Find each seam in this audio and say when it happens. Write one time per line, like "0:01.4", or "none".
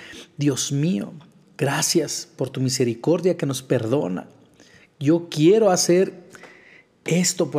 none